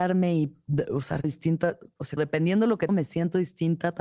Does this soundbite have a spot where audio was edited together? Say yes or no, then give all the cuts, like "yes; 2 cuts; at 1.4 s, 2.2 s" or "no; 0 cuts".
yes; 3 cuts; at 1.2 s, 2.2 s, 2.9 s